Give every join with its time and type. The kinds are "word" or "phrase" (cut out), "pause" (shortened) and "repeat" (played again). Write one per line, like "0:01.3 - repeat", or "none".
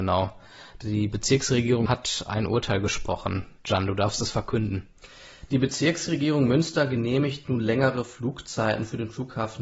0:01.9 - word